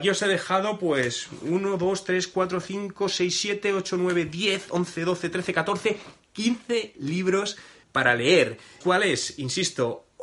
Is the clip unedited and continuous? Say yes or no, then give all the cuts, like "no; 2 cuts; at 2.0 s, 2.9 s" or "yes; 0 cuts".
no; 2 cuts; at 7.8 s, 8.8 s